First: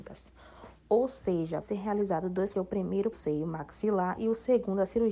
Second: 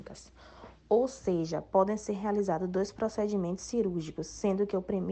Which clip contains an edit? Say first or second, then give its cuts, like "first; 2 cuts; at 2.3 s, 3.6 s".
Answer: first; 3 cuts; at 1.6 s, 2.5 s, 3.1 s